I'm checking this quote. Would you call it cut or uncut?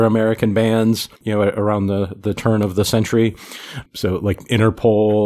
cut